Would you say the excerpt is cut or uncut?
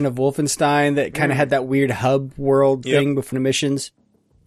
cut